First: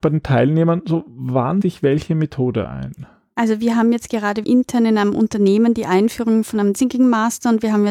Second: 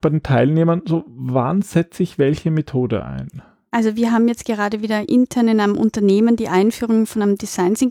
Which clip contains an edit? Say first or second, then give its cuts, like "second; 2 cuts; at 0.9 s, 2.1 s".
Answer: first; 3 cuts; at 1.6 s, 4.4 s, 6.7 s